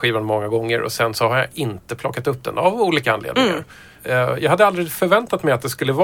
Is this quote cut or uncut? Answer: uncut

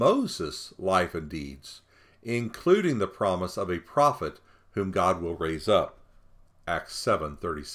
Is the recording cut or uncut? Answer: uncut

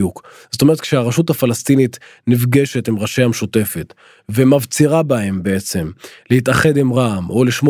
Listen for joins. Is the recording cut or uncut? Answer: uncut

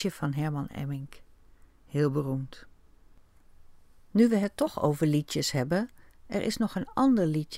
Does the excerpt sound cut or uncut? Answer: uncut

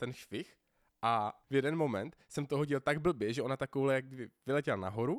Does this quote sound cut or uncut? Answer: uncut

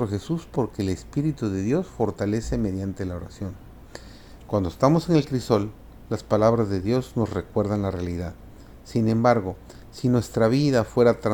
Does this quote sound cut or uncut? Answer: uncut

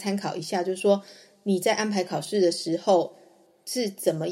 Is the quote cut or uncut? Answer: uncut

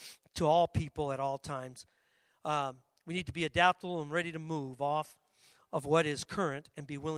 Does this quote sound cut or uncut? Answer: uncut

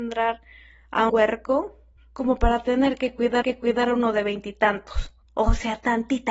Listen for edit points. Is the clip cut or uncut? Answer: cut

